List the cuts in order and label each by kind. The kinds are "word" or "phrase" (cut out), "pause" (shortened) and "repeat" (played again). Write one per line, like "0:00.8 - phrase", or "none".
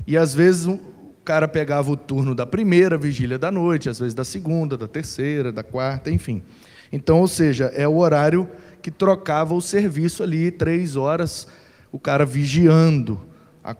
none